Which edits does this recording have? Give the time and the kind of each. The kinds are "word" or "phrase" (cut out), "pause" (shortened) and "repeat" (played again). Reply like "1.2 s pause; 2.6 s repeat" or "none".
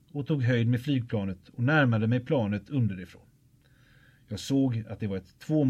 none